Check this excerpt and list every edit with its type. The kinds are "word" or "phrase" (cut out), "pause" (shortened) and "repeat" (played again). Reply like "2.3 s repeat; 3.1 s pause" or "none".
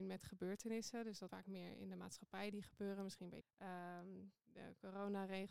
1.3 s word; 2.5 s word; 3.4 s phrase